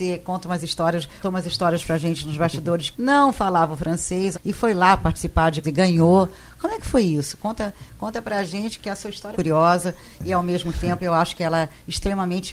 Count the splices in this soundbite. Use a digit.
6